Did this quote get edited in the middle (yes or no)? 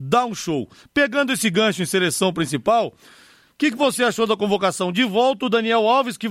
no